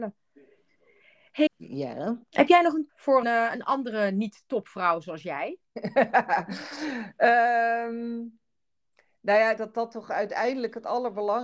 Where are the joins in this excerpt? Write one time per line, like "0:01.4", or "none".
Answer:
0:01.5
0:02.2
0:02.9
0:03.2
0:09.6